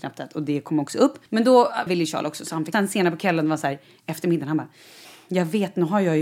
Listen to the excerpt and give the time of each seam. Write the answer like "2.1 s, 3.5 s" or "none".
1.3 s, 1.9 s, 2.7 s, 5.0 s